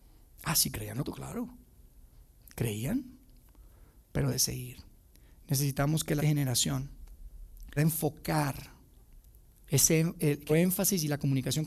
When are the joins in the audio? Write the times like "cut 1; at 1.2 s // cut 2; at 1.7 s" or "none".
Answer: cut 1; at 1.0 s // cut 2; at 4.3 s // cut 3; at 6.2 s // cut 4; at 7.8 s // cut 5; at 10.5 s